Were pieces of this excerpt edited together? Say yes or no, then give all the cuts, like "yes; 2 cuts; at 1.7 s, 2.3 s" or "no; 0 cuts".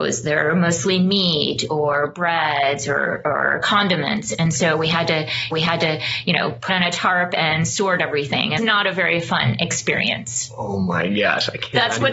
yes; 3 cuts; at 5.5 s, 6.7 s, 8.6 s